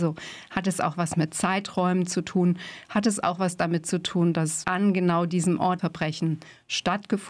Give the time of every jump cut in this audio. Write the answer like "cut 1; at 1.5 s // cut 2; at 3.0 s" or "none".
cut 1; at 4.6 s // cut 2; at 5.8 s